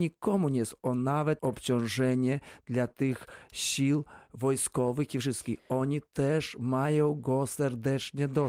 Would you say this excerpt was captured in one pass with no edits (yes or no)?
no